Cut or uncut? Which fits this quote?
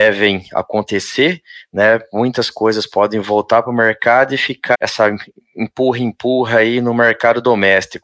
cut